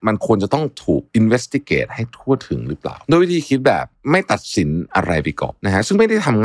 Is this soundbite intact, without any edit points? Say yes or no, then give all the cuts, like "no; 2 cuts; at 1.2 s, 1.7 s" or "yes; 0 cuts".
no; 2 cuts; at 1.1 s, 3.0 s